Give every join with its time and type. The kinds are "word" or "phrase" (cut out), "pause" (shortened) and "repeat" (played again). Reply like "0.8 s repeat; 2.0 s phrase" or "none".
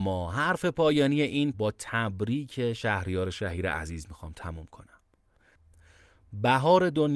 1.5 s phrase